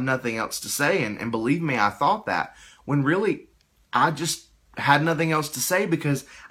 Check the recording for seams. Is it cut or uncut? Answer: uncut